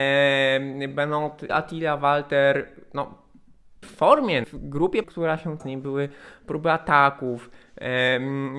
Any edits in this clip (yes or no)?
yes